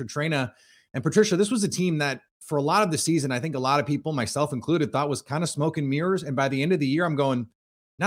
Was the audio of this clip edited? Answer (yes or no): no